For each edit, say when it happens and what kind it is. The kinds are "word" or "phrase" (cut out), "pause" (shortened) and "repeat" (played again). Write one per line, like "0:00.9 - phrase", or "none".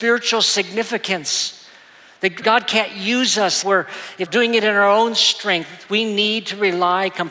0:02.4 - word
0:03.6 - word
0:04.3 - word